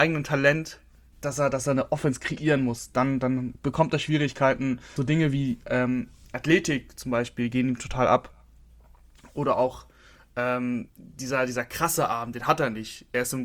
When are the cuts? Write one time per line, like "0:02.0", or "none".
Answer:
0:01.1
0:05.0
0:10.9